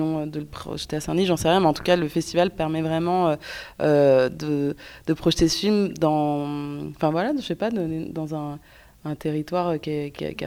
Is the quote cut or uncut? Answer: uncut